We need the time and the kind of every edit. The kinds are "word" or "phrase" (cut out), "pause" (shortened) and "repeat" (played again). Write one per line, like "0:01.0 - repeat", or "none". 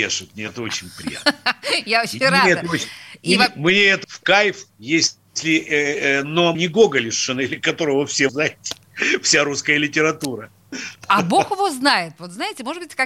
0:04.0 - word
0:04.7 - pause
0:06.5 - word
0:08.3 - word